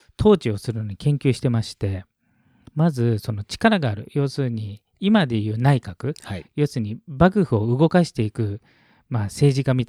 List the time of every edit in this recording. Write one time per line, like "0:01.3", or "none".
none